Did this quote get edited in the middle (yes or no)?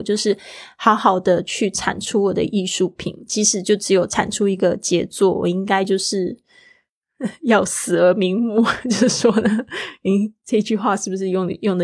no